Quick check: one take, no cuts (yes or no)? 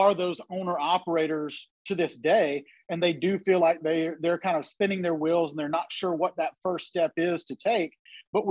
yes